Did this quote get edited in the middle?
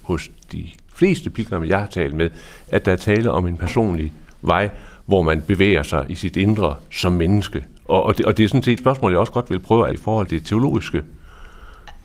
yes; 3 cuts; at 8.8 s, 9.9 s, 10.3 s

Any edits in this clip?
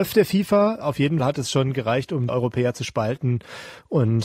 yes; 2 cuts; at 1.2 s, 2.3 s

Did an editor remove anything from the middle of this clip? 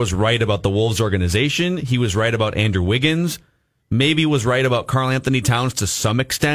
no; 0 cuts

